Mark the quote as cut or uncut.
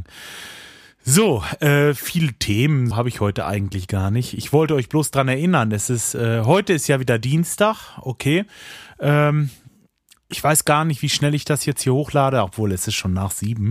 cut